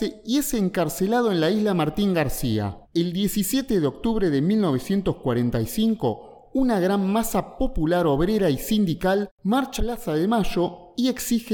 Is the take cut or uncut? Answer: cut